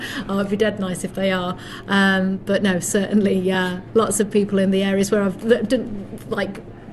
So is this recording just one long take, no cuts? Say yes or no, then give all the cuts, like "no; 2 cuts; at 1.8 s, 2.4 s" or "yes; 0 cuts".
yes; 0 cuts